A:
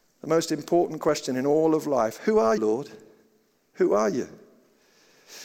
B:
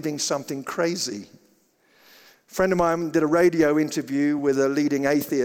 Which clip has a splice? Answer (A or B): A